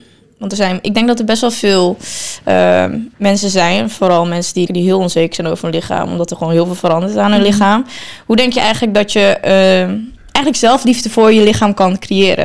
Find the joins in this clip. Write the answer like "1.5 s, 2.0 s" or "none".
3.1 s, 4.7 s, 10.2 s